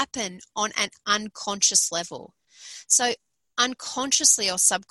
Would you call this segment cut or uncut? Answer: uncut